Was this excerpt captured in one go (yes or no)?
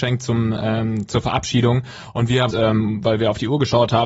no